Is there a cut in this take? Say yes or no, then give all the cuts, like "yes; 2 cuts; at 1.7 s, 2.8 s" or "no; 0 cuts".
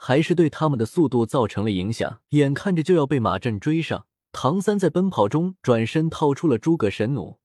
yes; 2 cuts; at 2.2 s, 4.2 s